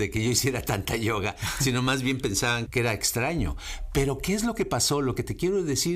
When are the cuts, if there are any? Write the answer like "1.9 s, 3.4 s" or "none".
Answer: 2.7 s